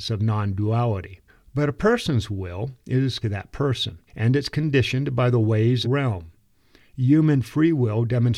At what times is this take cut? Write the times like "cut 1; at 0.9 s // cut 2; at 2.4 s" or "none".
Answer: cut 1; at 1.3 s // cut 2; at 3.2 s // cut 3; at 4.1 s // cut 4; at 5.8 s